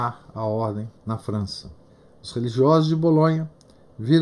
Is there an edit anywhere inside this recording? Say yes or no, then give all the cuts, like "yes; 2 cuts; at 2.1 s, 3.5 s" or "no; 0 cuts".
yes; 2 cuts; at 1.0 s, 1.9 s